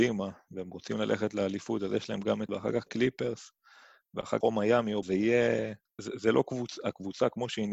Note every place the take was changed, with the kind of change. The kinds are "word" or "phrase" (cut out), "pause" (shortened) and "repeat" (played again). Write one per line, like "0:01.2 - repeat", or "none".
0:02.5 - word
0:02.9 - word
0:04.4 - word
0:05.0 - word
0:06.0 - word